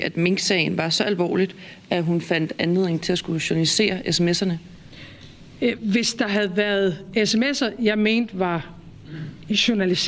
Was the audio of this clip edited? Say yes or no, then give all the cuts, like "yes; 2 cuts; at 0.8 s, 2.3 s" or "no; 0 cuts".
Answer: no; 0 cuts